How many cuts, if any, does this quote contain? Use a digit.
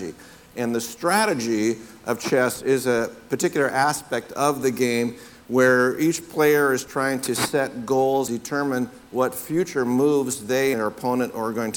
2